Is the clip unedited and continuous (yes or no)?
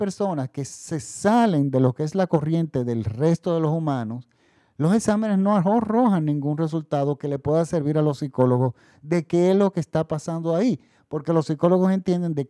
yes